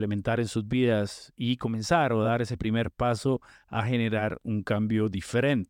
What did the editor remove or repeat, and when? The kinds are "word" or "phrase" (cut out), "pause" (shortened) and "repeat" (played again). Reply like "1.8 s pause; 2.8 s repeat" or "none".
none

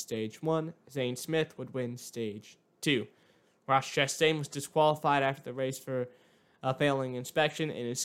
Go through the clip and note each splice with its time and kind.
none

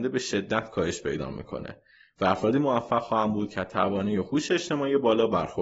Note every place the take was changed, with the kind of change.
none

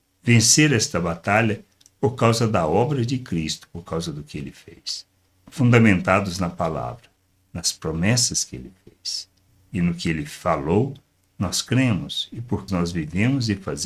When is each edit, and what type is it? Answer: 12.7 s word

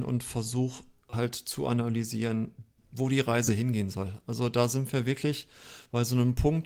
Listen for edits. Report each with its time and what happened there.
2.8 s word

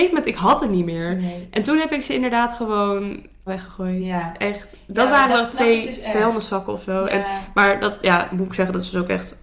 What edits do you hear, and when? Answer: 3.5 s word

